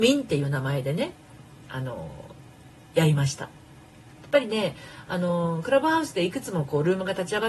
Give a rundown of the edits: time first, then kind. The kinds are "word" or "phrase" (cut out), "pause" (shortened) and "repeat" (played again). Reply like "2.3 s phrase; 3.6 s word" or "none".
none